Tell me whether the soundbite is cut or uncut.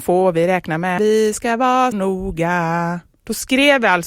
cut